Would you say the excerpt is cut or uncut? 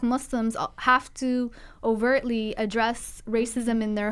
uncut